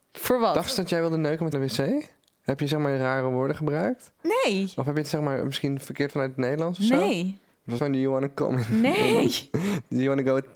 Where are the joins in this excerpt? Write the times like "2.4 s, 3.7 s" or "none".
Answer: 1.5 s, 6.1 s, 7.8 s